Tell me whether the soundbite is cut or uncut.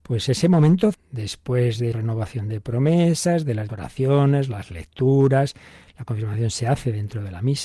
cut